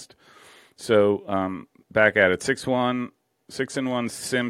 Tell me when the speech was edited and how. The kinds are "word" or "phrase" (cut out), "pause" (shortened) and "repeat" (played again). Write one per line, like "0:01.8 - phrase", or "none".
none

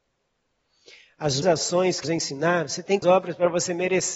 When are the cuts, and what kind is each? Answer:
0:01.4 - word
0:02.0 - word
0:03.0 - phrase

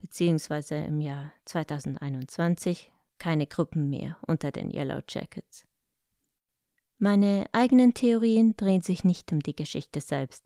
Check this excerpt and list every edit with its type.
none

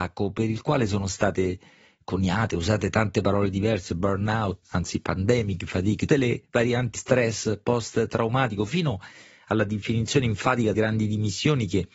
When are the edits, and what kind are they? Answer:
0:04.6 - word
0:06.1 - word
0:07.0 - word
0:10.7 - word

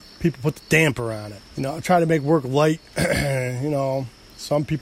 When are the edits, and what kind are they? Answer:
0:01.5 - pause

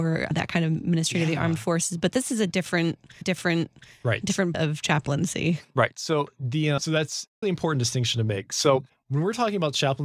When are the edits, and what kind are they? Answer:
0:03.2 - repeat
0:04.5 - word
0:07.4 - word
0:08.9 - pause

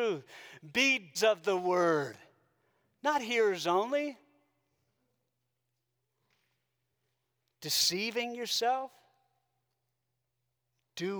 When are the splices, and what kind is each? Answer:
0:01.1 - word

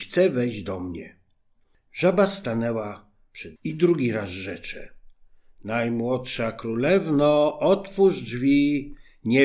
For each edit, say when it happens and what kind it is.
0:03.6 - word

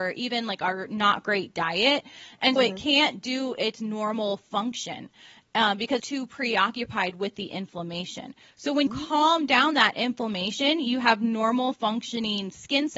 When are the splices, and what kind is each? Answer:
0:02.6 - word
0:06.0 - word
0:08.9 - word

